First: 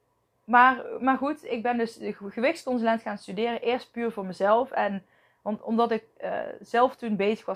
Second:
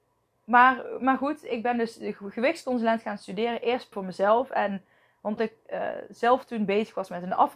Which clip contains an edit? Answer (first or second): second